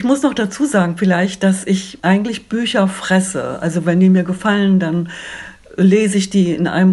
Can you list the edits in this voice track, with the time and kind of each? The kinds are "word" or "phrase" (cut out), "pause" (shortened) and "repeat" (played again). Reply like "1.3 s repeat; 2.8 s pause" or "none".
none